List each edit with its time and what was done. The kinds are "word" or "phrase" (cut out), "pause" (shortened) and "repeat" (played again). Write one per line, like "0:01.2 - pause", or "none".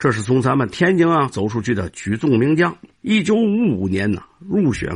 0:02.9 - pause